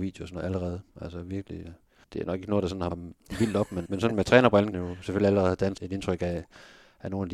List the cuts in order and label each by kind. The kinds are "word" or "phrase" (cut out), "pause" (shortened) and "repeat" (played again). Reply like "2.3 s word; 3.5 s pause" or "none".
2.0 s word; 2.9 s word; 3.9 s word; 4.7 s word; 5.8 s word